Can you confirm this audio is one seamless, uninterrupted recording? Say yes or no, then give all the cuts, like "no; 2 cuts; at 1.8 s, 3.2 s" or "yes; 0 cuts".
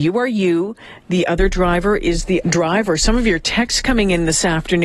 no; 1 cut; at 2.4 s